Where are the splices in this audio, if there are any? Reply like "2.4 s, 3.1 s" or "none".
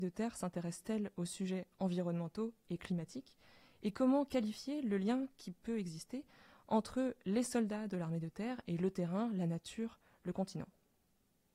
none